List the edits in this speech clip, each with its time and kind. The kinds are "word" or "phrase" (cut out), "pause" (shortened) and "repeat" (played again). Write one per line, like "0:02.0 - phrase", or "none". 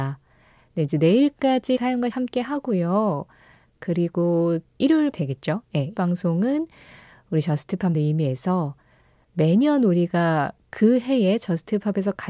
0:01.8 - word
0:02.1 - word
0:04.8 - word
0:05.1 - word
0:05.9 - word
0:07.9 - word